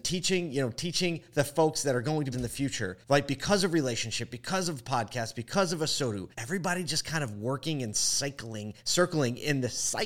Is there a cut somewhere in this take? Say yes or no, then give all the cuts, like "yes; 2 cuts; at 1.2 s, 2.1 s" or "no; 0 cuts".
yes; 4 cuts; at 2.3 s, 3.0 s, 6.3 s, 8.8 s